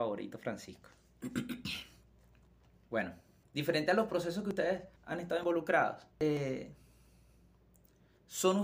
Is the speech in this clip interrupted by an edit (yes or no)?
yes